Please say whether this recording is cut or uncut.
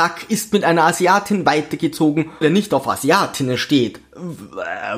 cut